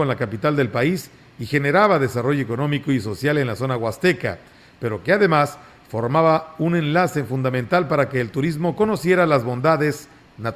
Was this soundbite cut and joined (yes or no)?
no